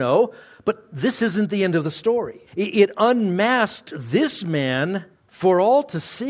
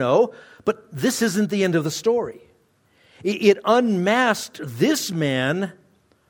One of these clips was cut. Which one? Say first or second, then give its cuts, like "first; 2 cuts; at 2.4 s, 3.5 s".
first; 2 cuts; at 2.5 s, 5.1 s